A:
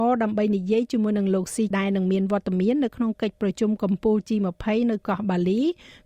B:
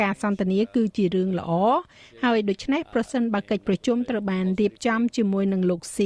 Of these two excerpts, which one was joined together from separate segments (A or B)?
A